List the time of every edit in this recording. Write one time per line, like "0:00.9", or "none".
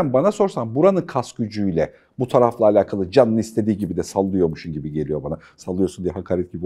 none